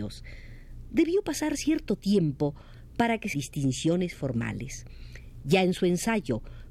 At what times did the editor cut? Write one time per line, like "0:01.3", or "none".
0:03.3